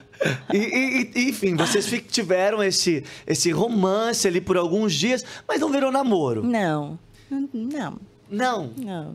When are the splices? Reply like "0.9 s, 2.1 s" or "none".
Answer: none